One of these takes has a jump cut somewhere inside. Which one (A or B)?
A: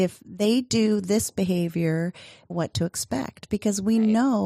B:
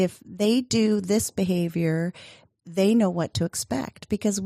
A